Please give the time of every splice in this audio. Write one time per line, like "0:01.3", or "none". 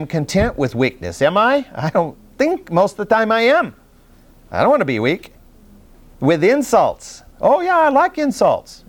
none